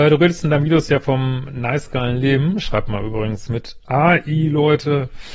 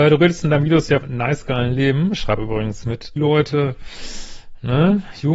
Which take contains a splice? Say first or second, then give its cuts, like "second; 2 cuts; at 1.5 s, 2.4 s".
second; 3 cuts; at 1.0 s, 2.4 s, 3.2 s